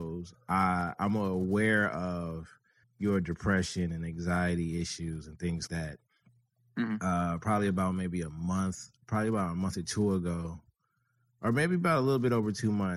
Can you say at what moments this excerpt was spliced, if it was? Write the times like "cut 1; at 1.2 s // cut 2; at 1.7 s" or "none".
cut 1; at 2.8 s // cut 2; at 5.7 s // cut 3; at 9.0 s